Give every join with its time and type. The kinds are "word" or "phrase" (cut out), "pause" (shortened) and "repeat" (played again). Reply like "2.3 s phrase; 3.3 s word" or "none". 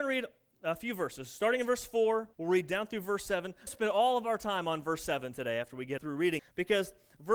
2.3 s pause; 3.7 s phrase; 6.0 s word; 6.4 s word